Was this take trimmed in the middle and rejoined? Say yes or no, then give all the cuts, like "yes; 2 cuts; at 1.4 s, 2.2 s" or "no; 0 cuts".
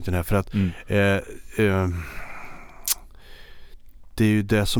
no; 0 cuts